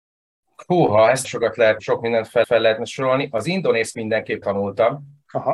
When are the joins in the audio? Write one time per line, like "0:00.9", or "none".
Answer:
0:01.2
0:01.8
0:02.4
0:03.9
0:04.4